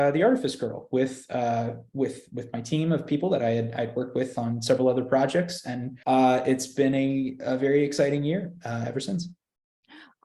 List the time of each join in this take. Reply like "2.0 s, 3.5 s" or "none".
6.0 s